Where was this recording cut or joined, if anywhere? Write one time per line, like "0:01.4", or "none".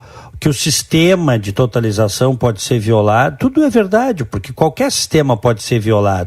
none